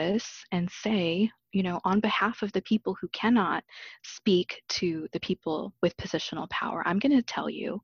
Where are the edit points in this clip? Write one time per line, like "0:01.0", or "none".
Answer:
none